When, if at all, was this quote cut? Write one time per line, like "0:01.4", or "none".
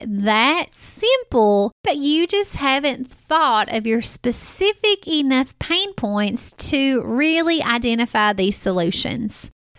none